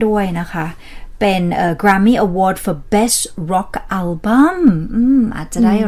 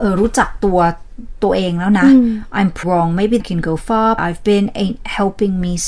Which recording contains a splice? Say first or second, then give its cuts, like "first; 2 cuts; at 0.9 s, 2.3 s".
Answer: second; 3 cuts; at 2.8 s, 3.4 s, 4.2 s